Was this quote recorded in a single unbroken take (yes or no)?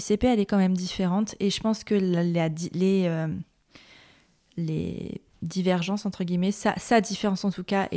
yes